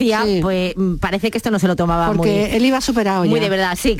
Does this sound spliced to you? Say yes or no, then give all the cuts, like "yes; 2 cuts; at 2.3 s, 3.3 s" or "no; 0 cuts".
no; 0 cuts